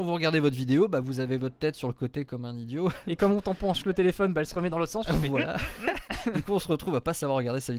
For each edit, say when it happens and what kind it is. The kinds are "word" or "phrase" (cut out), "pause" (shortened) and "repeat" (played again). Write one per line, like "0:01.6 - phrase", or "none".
none